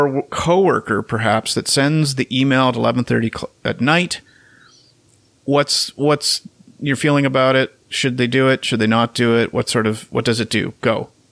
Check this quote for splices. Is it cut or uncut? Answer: cut